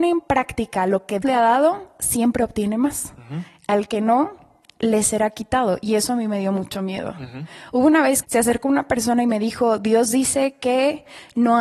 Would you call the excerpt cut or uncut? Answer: cut